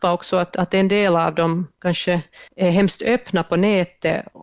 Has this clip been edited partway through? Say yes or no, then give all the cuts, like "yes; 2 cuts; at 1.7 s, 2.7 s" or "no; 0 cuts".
yes; 1 cut; at 2.5 s